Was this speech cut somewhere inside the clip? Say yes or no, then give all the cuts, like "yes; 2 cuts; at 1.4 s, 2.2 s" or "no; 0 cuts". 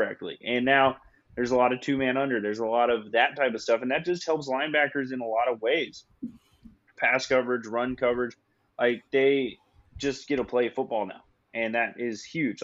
no; 0 cuts